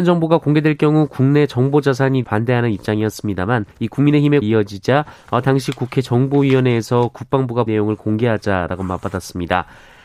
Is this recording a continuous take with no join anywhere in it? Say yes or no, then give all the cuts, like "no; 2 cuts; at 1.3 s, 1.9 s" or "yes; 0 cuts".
no; 4 cuts; at 2.2 s, 3.7 s, 4.4 s, 7.7 s